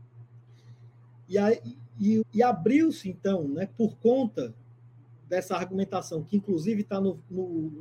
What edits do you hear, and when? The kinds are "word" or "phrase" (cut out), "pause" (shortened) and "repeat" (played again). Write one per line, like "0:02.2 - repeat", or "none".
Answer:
0:02.2 - word